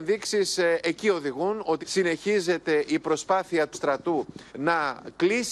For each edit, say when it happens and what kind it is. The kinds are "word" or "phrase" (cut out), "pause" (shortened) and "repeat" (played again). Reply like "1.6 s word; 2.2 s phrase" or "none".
1.8 s word; 3.7 s word; 4.5 s pause